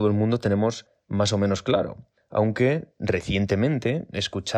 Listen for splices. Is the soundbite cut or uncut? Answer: uncut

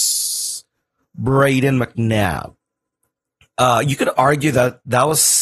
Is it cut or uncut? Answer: uncut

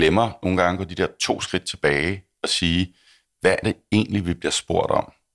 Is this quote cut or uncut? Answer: cut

